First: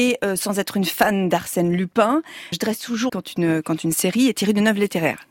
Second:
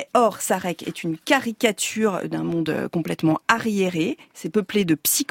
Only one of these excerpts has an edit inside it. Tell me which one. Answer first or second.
first